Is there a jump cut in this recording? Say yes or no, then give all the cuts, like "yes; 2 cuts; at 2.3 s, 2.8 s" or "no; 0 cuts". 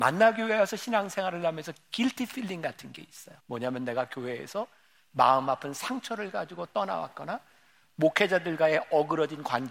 yes; 1 cut; at 3.4 s